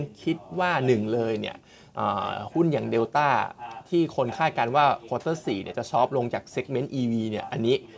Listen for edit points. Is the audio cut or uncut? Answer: uncut